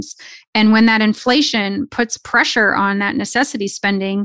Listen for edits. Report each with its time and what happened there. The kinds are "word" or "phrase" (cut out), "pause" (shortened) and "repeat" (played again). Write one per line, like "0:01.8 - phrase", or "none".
none